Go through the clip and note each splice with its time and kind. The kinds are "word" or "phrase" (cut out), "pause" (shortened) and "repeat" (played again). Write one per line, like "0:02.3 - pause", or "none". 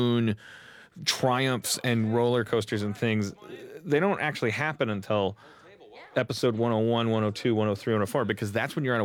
none